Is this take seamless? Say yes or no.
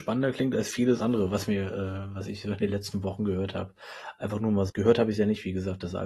no